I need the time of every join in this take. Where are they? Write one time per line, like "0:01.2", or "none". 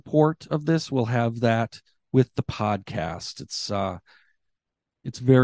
none